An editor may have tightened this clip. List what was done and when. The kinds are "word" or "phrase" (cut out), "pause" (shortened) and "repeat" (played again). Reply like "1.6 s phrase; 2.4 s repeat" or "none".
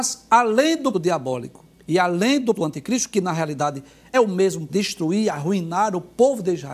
0.9 s word; 1.7 s pause; 2.5 s word; 4.1 s word; 4.7 s word